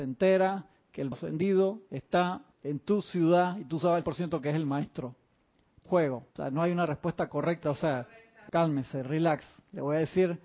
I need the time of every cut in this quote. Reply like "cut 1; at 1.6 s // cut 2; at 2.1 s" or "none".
cut 1; at 1.1 s // cut 2; at 2.5 s // cut 3; at 4.0 s // cut 4; at 5.9 s // cut 5; at 6.3 s // cut 6; at 7.6 s // cut 7; at 8.5 s